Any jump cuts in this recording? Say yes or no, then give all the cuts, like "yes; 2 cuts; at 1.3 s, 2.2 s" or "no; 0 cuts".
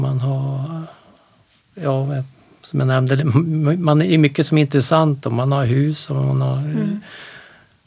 no; 0 cuts